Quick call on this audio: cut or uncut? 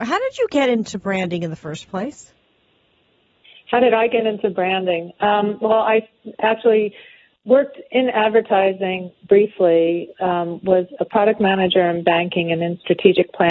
uncut